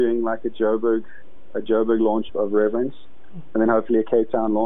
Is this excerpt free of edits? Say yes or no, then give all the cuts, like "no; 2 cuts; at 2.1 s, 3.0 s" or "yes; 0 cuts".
no; 1 cut; at 2.3 s